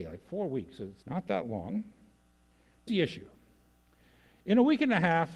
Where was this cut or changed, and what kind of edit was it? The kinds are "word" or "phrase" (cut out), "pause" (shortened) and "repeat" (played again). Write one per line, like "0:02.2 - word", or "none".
0:01.0 - word
0:02.9 - word